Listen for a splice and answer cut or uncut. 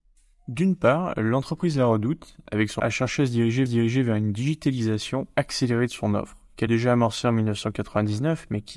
cut